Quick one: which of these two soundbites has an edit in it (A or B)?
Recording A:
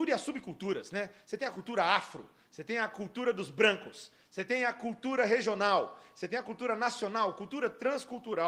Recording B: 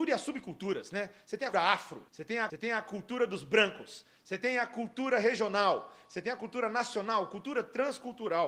B